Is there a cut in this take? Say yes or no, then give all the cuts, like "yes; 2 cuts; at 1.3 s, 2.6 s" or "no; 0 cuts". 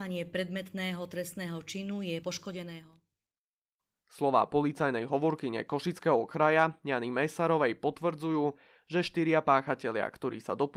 yes; 1 cut; at 2.2 s